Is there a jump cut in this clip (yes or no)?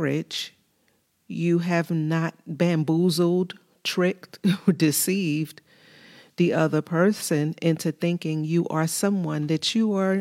no